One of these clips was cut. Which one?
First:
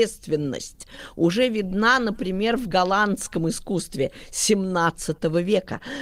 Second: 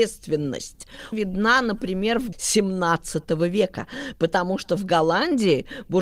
second; 2 cuts; at 1.1 s, 2.3 s

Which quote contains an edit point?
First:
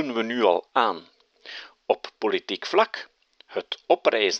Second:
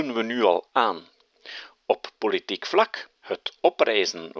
second; 1 cut; at 3.2 s

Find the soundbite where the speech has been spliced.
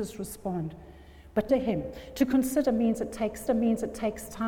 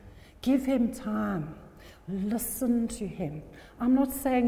first; 2 cuts; at 1.5 s, 3.5 s

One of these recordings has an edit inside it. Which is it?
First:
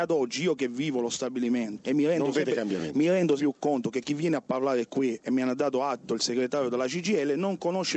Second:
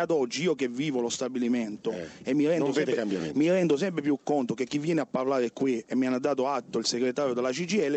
first; 2 cuts; at 1.8 s, 3.4 s

